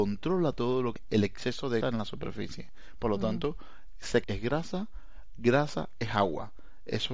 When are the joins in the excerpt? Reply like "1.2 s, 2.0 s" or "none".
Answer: 1.0 s, 1.8 s, 4.2 s